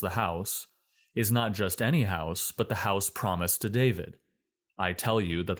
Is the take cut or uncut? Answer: uncut